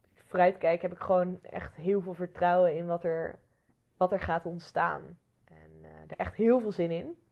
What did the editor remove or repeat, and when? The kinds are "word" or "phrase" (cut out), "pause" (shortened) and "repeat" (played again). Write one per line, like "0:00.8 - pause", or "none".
0:03.7 - pause
0:05.3 - pause
0:06.1 - word